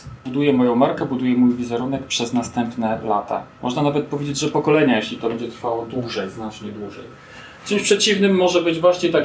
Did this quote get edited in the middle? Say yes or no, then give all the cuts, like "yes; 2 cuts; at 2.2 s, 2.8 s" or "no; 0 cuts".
no; 0 cuts